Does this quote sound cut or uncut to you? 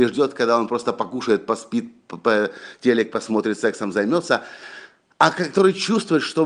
uncut